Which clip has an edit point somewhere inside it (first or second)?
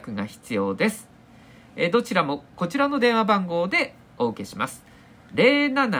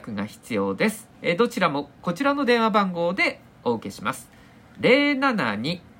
second